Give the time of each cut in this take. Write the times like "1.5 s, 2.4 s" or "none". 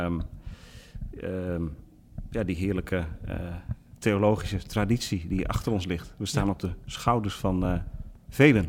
none